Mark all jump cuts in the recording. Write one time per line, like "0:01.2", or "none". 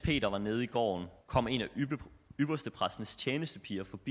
0:01.2